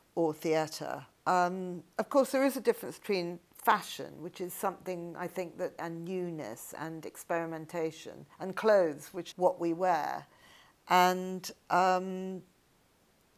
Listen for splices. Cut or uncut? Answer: cut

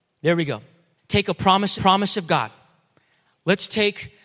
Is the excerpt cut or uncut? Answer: cut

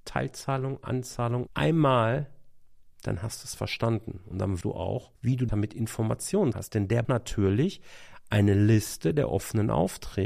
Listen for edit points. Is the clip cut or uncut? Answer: cut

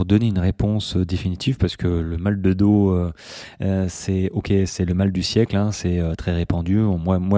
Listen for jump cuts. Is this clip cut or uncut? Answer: uncut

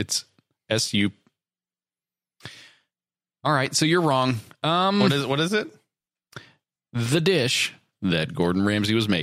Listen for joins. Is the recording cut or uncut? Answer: uncut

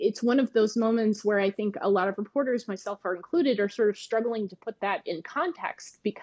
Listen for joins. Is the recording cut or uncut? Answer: uncut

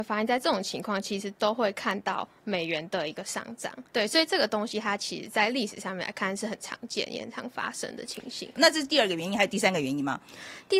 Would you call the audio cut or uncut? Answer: cut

